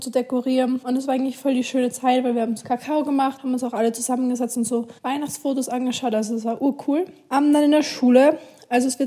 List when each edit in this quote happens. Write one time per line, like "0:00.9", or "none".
0:05.0